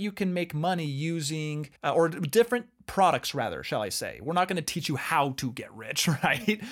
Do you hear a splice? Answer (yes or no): yes